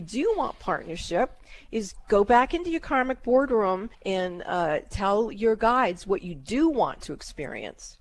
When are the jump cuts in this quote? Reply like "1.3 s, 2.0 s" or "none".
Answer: 3.9 s

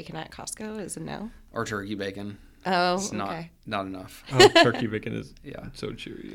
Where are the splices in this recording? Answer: none

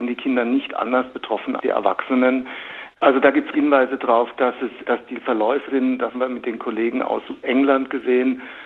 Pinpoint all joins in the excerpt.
1.6 s, 3.5 s, 4.8 s, 5.7 s, 6.1 s, 7.4 s

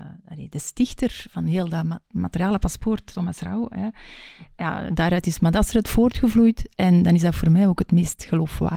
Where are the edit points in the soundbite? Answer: 2.0 s

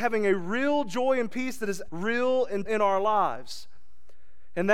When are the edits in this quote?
1.9 s, 2.7 s

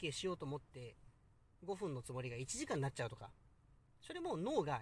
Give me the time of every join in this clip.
none

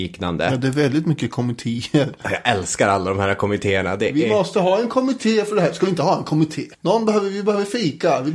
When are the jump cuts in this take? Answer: 6.7 s

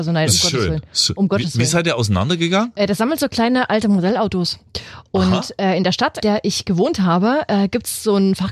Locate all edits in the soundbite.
6.2 s

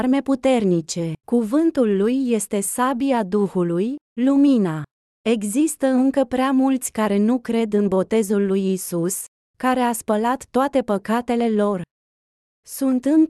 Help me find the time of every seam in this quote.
1.2 s

